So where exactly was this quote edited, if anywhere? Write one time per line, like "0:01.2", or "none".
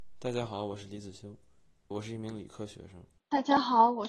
0:01.9
0:03.2

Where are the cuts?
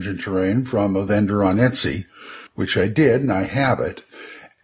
0:02.5

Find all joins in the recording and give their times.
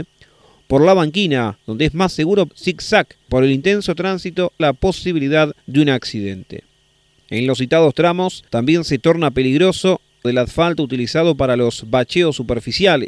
0:01.6
0:02.5
0:03.3
0:04.6
0:05.6
0:07.0
0:08.5
0:10.2

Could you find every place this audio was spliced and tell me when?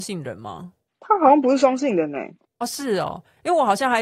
none

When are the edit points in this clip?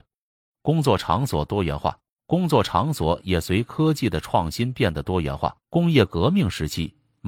0:02.1
0:05.6

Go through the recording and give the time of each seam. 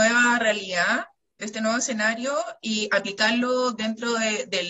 none

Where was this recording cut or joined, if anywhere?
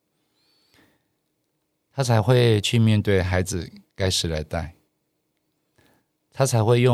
none

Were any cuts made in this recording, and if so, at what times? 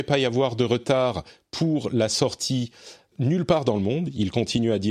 0:03.1

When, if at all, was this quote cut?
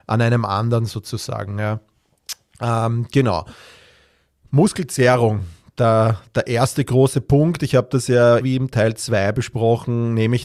0:08.4

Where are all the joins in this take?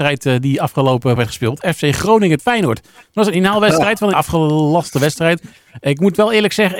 0:01.2
0:02.4
0:04.1

